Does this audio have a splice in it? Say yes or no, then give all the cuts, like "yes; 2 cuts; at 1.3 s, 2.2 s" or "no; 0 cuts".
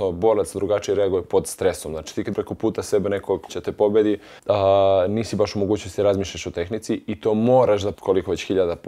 yes; 4 cuts; at 2.3 s, 3.5 s, 4.4 s, 7.9 s